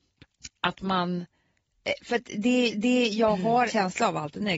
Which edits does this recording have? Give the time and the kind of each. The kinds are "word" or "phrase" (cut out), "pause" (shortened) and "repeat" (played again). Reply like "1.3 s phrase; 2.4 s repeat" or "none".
2.7 s repeat; 3.7 s word